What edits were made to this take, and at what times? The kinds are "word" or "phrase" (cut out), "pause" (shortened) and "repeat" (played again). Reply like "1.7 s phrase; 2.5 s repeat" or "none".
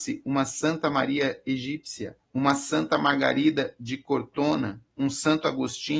2.2 s pause